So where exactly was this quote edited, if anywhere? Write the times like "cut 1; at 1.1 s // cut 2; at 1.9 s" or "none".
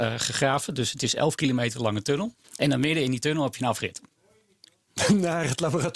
cut 1; at 2.4 s